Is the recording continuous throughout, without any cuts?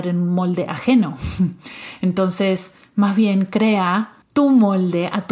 no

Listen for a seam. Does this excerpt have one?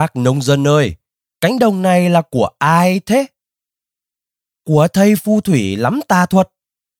no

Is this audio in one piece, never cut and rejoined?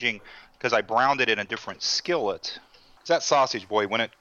yes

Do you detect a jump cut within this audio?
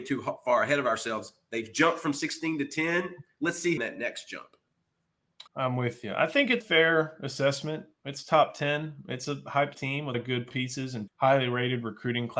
yes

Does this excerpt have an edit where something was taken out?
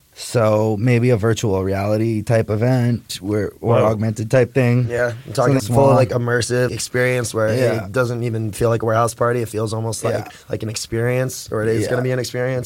yes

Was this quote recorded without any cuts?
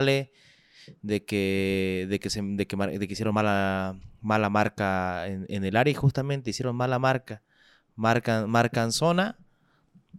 yes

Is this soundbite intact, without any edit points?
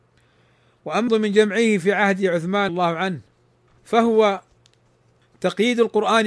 no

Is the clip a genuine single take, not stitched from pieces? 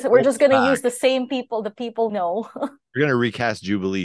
no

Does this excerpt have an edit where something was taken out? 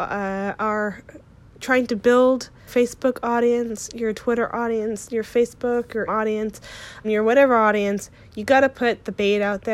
yes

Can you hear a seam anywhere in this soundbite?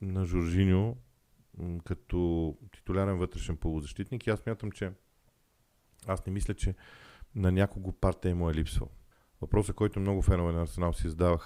yes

